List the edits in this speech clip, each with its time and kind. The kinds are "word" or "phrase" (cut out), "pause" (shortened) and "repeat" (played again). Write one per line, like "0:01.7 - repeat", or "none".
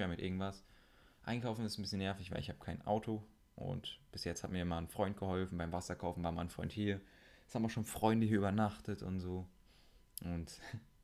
none